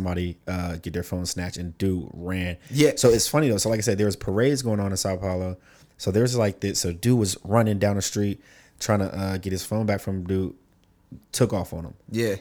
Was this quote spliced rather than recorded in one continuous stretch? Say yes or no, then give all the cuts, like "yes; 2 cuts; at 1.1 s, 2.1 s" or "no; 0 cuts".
no; 0 cuts